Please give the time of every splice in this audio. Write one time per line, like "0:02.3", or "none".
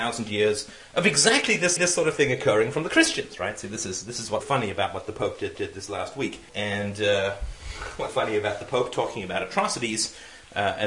0:01.8
0:04.4
0:05.6
0:06.5
0:08.1